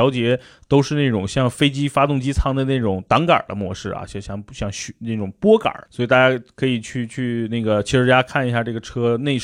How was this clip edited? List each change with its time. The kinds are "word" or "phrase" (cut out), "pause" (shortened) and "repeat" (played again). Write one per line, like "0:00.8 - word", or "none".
0:05.9 - pause